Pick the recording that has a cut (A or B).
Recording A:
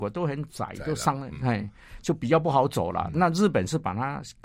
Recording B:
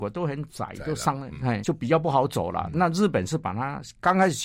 B